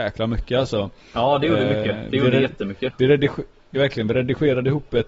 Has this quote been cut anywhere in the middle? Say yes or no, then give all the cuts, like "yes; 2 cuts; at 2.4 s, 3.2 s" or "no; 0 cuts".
yes; 1 cut; at 3.7 s